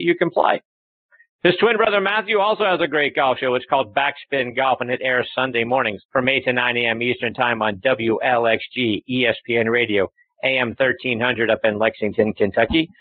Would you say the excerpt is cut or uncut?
cut